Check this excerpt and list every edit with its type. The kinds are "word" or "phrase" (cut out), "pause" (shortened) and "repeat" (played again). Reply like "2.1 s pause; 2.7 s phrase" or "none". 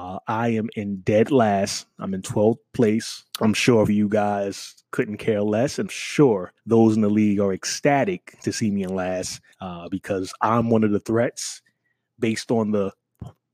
3.3 s pause; 3.9 s word; 4.9 s pause; 5.9 s word; 6.6 s pause; 9.5 s pause